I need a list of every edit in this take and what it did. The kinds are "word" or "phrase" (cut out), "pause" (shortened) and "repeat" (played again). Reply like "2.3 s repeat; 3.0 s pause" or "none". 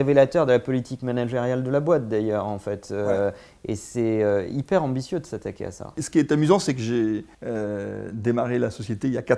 7.3 s pause